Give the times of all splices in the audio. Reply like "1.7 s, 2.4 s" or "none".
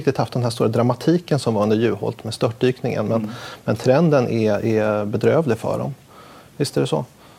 none